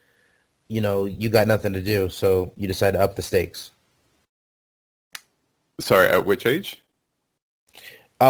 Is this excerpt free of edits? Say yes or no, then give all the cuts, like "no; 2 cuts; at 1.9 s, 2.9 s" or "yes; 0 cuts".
yes; 0 cuts